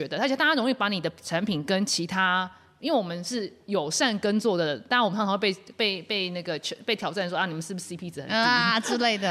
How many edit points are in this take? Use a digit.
0